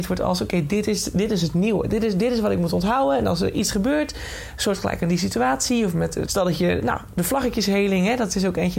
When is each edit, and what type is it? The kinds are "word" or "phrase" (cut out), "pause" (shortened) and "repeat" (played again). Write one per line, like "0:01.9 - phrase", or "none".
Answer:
0:06.3 - word